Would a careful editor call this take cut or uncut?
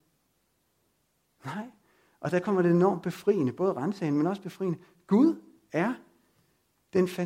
uncut